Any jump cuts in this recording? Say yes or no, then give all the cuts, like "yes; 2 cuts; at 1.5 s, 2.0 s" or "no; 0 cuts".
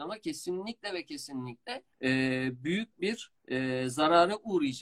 yes; 2 cuts; at 1.9 s, 3.4 s